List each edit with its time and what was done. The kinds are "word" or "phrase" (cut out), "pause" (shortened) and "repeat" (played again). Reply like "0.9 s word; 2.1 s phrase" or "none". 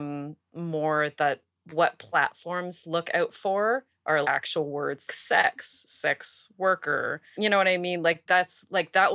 4.2 s word; 5.1 s word; 8.3 s word